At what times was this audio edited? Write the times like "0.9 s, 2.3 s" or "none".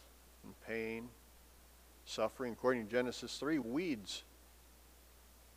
3.6 s